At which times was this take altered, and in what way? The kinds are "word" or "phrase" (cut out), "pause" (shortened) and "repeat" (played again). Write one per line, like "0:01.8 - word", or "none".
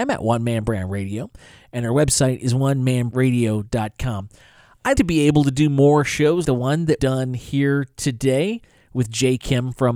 0:03.1 - word
0:04.9 - word
0:06.4 - word
0:07.0 - word